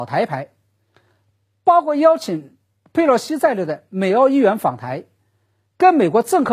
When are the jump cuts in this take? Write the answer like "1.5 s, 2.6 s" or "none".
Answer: none